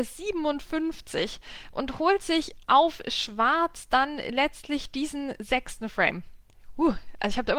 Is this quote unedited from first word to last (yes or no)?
yes